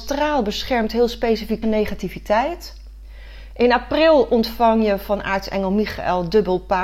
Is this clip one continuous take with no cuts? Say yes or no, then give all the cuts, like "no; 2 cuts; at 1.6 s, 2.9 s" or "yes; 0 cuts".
no; 1 cut; at 1.6 s